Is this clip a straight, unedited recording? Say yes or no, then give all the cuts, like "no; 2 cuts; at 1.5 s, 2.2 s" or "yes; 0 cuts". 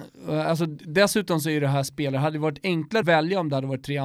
no; 1 cut; at 3.0 s